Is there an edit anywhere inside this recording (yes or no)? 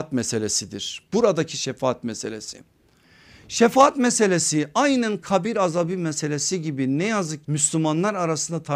yes